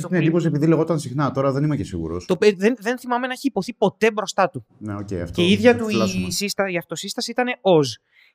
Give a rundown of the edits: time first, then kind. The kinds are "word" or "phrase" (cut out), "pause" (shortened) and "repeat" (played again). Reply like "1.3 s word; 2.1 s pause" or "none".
none